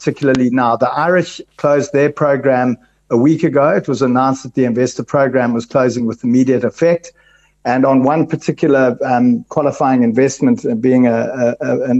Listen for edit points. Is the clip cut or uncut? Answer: uncut